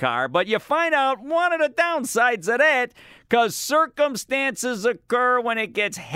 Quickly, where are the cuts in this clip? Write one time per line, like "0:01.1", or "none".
none